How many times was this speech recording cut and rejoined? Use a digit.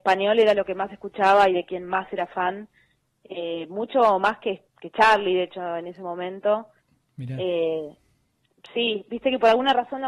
0